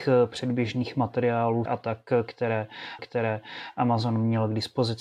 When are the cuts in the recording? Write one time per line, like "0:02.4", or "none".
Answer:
0:01.7
0:03.0